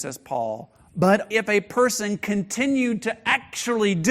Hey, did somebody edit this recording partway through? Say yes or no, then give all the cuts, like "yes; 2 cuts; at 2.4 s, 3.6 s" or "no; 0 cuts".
yes; 1 cut; at 1.3 s